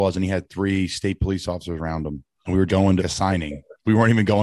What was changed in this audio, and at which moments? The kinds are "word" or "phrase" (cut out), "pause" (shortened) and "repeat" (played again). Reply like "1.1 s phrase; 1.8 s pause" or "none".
2.7 s word; 3.0 s word